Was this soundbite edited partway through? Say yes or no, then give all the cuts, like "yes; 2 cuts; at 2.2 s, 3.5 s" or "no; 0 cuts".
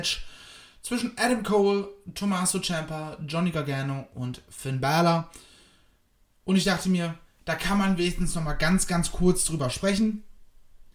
no; 0 cuts